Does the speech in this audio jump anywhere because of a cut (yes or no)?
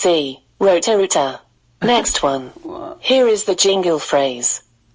no